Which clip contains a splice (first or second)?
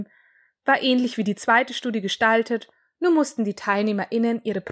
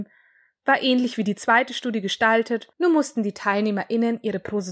second